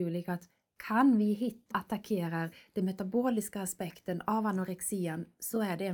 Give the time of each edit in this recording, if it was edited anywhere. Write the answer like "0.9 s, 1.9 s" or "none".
1.7 s